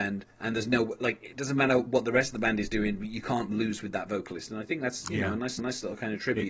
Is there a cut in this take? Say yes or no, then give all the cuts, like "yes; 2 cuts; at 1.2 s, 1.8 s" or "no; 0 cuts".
yes; 1 cut; at 5.6 s